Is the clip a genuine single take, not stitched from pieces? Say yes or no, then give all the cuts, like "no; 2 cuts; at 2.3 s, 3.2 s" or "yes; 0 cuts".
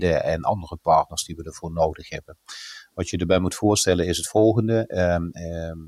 yes; 0 cuts